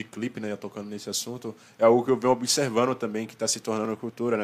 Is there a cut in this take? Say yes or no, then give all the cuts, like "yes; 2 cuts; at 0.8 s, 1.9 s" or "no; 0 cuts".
no; 0 cuts